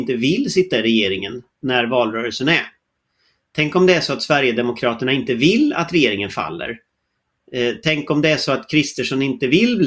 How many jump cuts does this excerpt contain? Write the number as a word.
zero